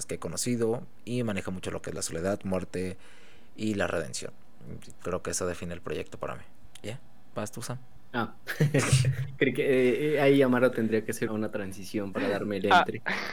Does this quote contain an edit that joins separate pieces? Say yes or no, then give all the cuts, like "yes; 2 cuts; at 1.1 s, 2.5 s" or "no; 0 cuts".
yes; 2 cuts; at 11.3 s, 12.1 s